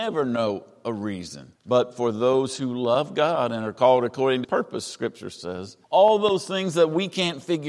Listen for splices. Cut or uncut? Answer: cut